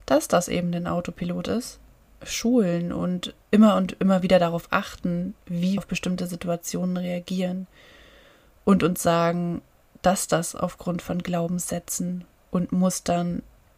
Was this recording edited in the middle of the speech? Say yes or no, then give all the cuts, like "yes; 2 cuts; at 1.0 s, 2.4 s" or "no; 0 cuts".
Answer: yes; 3 cuts; at 3.4 s, 5.8 s, 9.8 s